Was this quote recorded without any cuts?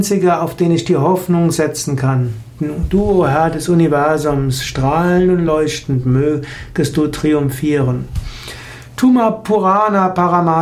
yes; 0 cuts

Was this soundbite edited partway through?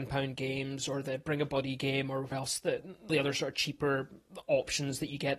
yes; 2 cuts; at 2.3 s, 3.1 s

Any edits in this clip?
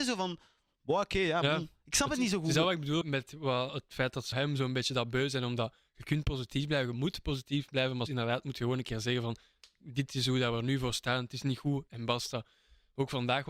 yes; 3 cuts; at 3.0 s, 4.3 s, 8.1 s

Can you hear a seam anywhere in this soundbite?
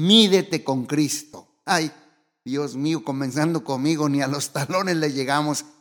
no; 0 cuts

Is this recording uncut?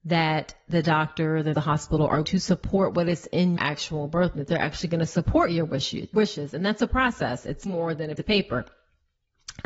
no; 7 cuts; at 1.5 s, 2.2 s, 3.6 s, 4.4 s, 6.1 s, 7.7 s, 8.2 s

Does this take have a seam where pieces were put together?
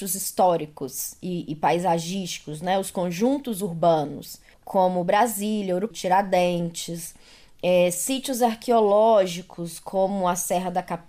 yes; 1 cut; at 5.9 s

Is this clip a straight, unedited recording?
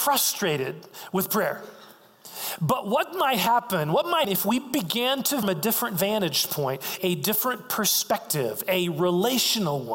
no; 3 cuts; at 4.2 s, 5.4 s, 7.0 s

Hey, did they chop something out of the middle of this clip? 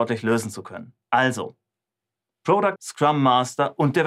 yes; 2 cuts; at 1.0 s, 2.8 s

